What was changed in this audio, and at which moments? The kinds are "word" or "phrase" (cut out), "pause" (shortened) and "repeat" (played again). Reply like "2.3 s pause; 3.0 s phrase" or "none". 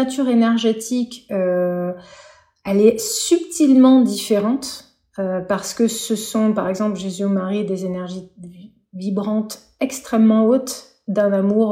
none